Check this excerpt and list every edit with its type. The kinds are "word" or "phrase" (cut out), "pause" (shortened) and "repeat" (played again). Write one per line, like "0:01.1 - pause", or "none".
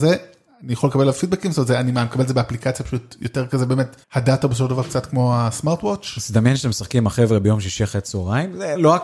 0:04.0 - pause